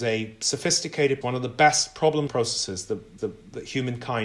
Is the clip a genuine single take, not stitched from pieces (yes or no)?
no